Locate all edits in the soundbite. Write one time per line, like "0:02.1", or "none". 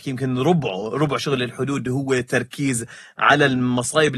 none